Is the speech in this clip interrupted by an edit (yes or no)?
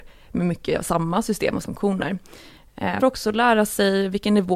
yes